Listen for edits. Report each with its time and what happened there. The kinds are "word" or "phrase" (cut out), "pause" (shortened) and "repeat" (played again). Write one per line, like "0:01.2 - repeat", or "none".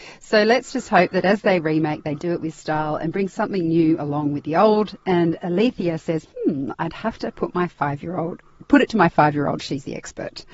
none